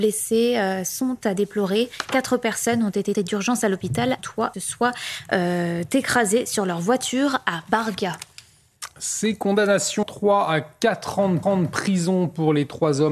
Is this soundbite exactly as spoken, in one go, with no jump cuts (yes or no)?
no